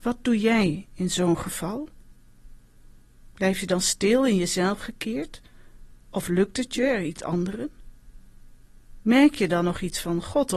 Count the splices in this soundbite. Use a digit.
2